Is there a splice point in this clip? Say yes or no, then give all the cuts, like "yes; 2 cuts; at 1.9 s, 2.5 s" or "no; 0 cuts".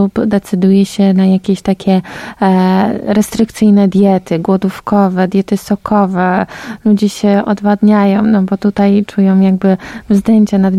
no; 0 cuts